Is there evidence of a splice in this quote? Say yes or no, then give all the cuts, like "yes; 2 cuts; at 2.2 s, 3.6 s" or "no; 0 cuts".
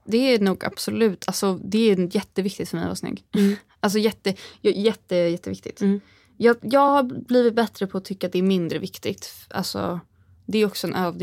no; 0 cuts